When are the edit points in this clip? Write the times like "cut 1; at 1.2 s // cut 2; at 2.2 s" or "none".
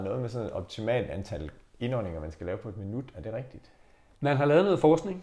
none